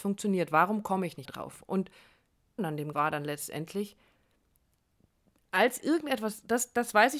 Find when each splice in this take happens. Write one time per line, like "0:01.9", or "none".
0:01.2
0:02.6
0:02.9
0:05.8